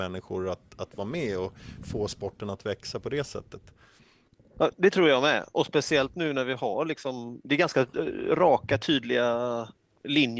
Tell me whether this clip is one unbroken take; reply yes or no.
yes